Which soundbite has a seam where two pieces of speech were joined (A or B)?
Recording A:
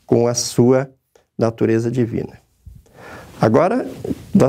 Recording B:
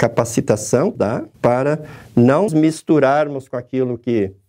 B